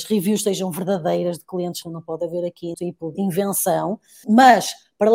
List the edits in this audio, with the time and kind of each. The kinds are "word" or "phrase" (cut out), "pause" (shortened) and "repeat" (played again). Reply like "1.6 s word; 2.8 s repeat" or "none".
1.8 s word; 2.7 s word; 3.1 s word; 4.2 s word

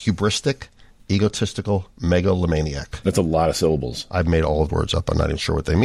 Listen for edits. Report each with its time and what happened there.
4.7 s word

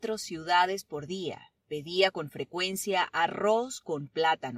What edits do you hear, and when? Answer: 1.6 s pause

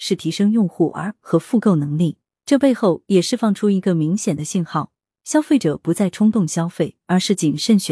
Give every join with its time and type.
1.2 s word

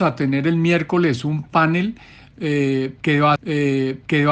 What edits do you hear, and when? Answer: 3.4 s repeat

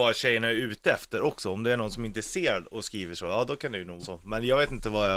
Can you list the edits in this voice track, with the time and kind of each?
4.0 s word

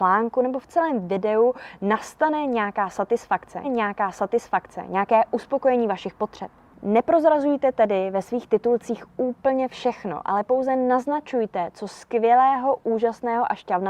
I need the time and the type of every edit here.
3.6 s repeat

